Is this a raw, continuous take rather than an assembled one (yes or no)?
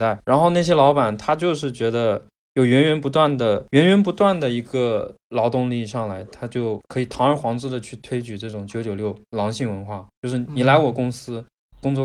no